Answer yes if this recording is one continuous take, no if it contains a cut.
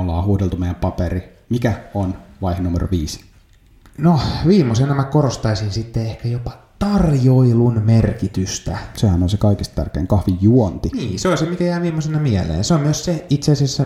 yes